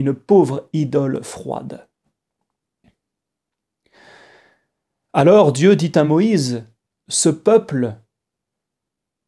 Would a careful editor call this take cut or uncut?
uncut